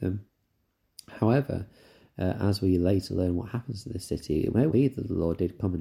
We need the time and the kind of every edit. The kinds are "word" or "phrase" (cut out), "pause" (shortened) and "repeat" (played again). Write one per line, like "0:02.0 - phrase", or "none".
0:04.7 - word

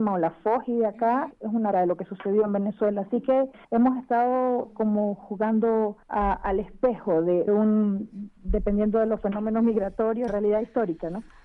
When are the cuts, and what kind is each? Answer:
0:01.3 - word
0:01.7 - word
0:03.6 - pause
0:06.0 - pause
0:07.5 - word
0:10.3 - phrase

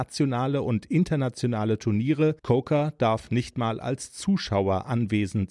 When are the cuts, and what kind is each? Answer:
0:02.4 - pause

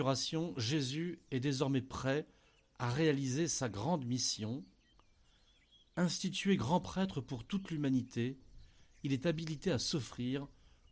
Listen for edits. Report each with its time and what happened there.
none

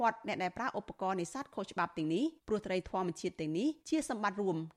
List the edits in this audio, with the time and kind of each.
0:02.4 - pause
0:03.8 - pause

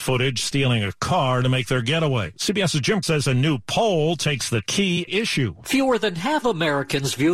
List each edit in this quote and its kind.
0:02.4 - pause
0:03.0 - word
0:04.6 - phrase
0:05.1 - word
0:06.4 - word

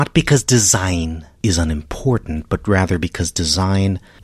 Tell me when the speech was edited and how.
0:01.4 - pause

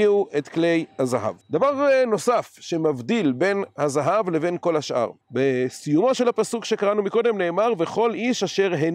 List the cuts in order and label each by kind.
0:01.4 - pause
0:05.2 - pause

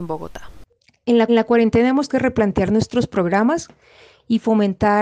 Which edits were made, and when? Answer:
0:01.3 - repeat
0:02.1 - word

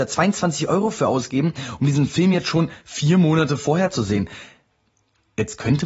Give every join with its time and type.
none

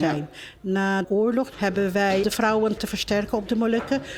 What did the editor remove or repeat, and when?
0:01.0 - word
0:02.2 - word
0:02.8 - word

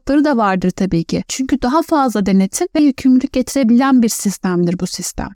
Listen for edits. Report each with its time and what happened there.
0:02.8 - word

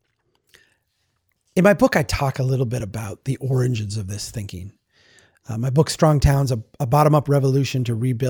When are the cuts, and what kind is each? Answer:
none

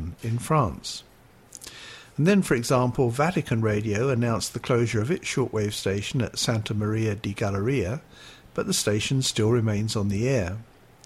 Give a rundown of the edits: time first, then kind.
none

